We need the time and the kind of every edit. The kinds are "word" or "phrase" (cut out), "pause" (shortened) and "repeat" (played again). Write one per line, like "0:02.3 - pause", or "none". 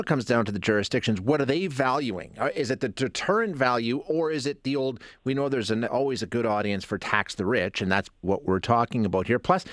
0:05.9 - word
0:08.2 - word